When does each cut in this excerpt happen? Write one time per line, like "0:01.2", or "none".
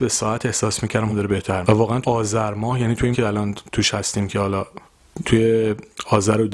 0:01.1
0:01.6
0:02.0
0:03.1
0:05.2